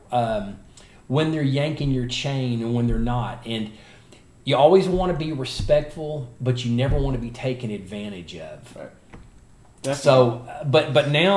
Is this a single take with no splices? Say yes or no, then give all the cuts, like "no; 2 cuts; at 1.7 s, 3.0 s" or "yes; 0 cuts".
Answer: yes; 0 cuts